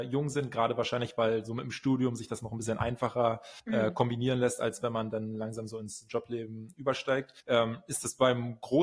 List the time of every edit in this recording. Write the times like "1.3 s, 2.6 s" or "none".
3.6 s, 7.4 s